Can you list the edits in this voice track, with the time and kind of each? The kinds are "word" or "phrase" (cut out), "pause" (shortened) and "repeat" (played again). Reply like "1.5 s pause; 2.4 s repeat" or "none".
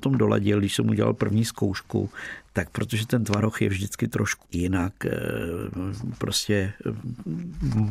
4.5 s word